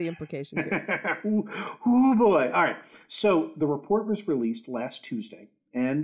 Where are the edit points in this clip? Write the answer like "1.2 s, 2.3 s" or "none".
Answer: none

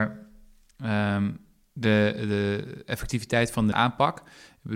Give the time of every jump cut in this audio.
3.7 s

